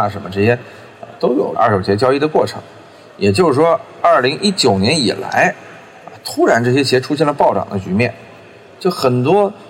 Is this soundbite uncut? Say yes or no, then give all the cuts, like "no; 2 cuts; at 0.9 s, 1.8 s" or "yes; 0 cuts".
yes; 0 cuts